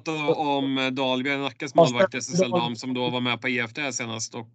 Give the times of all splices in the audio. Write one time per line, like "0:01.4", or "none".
none